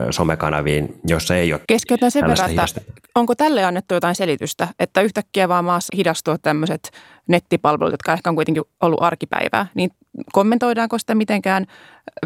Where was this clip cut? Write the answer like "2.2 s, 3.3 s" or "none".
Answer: 1.6 s, 5.9 s